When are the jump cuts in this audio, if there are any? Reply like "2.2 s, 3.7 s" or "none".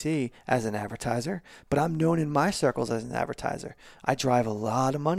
none